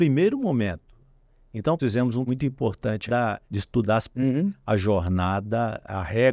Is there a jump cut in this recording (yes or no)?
yes